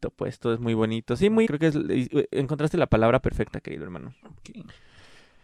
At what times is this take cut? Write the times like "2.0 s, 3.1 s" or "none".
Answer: 1.4 s